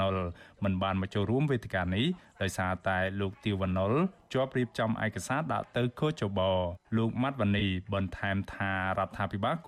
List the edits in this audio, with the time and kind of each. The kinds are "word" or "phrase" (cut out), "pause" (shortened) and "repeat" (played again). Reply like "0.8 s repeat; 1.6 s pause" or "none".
6.8 s pause